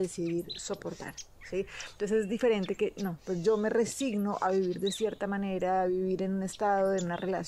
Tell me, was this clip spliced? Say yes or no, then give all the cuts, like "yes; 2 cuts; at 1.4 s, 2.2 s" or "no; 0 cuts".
no; 0 cuts